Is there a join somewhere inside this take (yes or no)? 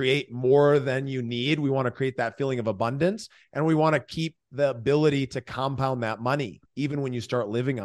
no